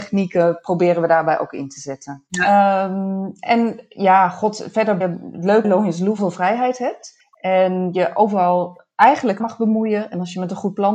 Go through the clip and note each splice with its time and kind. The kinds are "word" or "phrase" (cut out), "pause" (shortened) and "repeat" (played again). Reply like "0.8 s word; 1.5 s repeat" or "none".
2.3 s pause; 5.0 s phrase; 5.6 s word; 6.2 s phrase; 7.2 s pause; 9.4 s word